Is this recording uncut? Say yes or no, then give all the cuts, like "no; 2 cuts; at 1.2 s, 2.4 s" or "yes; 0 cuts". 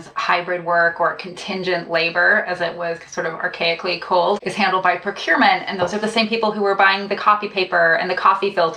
yes; 0 cuts